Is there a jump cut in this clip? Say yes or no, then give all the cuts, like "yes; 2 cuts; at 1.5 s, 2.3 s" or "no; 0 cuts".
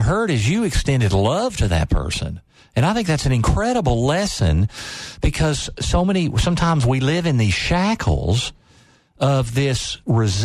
no; 0 cuts